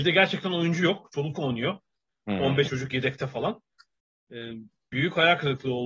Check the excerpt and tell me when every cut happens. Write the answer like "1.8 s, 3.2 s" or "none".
1.3 s, 2.6 s